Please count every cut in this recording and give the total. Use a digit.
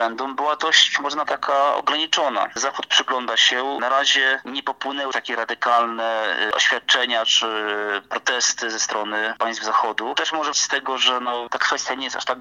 3